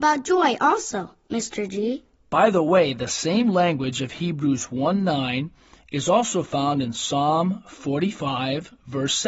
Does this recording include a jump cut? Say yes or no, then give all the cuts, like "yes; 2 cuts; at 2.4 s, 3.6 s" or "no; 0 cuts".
no; 0 cuts